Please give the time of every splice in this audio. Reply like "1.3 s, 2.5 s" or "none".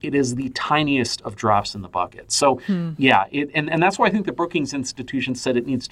none

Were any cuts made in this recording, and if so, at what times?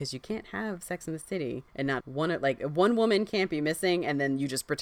1.7 s, 2.0 s

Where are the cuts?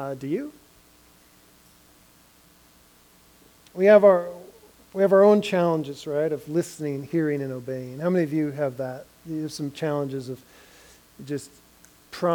none

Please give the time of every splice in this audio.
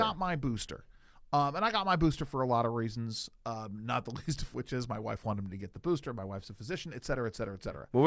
none

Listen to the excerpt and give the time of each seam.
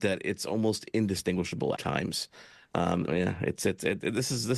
1.8 s, 3.1 s

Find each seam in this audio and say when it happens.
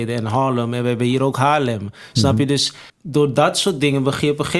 2.9 s

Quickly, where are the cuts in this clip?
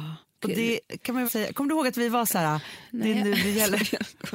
1.2 s

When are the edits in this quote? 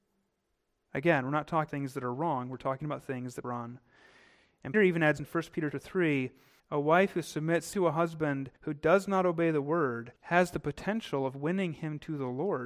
1.7 s, 3.4 s, 4.7 s, 5.2 s, 5.7 s, 6.6 s, 7.7 s, 8.6 s, 10.2 s

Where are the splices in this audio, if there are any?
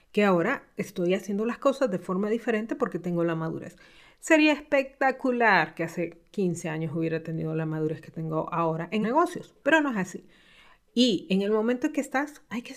9.0 s

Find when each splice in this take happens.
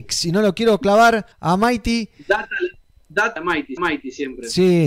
1.3 s, 3.4 s, 3.8 s

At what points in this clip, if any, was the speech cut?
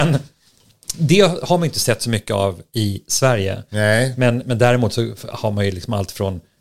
0.9 s

